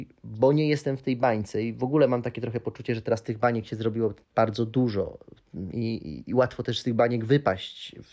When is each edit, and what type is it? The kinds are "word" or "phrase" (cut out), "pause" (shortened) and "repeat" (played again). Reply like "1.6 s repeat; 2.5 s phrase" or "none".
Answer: 4.2 s pause